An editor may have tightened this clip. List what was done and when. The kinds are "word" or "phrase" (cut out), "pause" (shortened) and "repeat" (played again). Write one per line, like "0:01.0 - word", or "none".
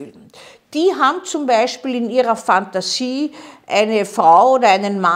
none